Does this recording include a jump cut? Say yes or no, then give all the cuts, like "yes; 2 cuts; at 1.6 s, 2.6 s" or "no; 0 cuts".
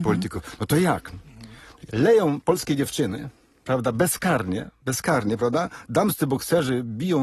no; 0 cuts